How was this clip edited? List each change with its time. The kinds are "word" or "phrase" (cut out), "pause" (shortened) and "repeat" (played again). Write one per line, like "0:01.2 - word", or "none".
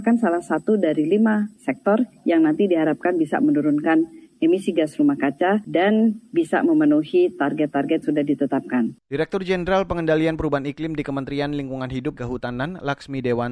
0:08.0 - word
0:12.2 - word